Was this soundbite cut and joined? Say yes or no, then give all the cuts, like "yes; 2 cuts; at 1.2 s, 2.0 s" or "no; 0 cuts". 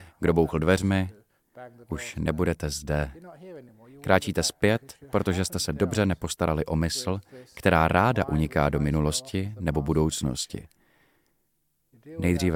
no; 0 cuts